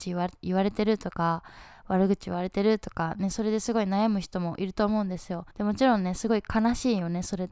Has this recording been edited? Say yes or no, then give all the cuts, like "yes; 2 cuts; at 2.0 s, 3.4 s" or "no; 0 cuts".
yes; 1 cut; at 5.5 s